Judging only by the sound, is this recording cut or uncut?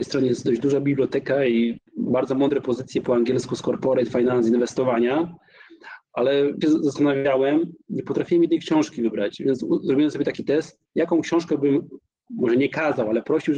cut